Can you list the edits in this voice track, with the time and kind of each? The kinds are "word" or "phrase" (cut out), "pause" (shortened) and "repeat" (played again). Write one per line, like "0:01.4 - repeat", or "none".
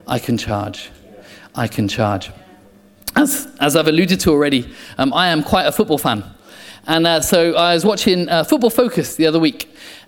none